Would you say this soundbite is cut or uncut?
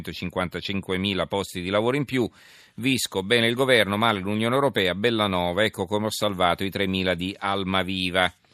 uncut